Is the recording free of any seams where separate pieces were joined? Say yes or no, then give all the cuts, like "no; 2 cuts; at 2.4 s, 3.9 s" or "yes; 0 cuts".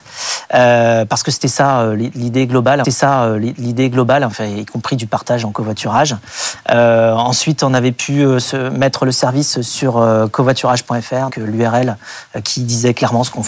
no; 2 cuts; at 2.8 s, 11.3 s